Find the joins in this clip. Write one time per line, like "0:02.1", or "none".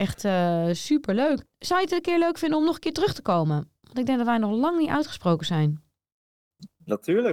0:01.5